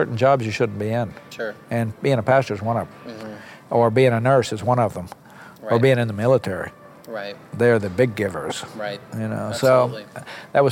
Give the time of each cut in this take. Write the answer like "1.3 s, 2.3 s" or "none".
none